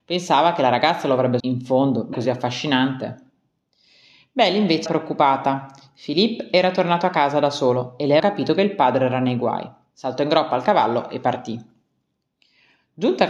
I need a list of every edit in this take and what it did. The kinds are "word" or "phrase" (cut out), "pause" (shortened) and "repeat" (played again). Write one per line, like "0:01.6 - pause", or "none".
0:01.4 - word
0:02.1 - word
0:04.9 - word
0:08.2 - word